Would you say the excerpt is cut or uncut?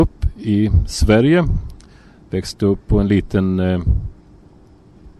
uncut